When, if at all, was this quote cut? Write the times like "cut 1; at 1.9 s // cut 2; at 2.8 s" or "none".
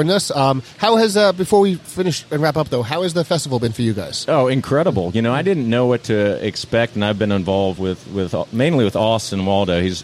none